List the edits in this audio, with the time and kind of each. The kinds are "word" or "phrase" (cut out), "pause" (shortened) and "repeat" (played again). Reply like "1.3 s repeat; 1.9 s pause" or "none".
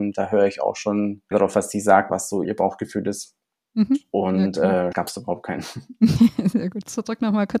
1.3 s word; 2.1 s word; 2.4 s word; 4.9 s word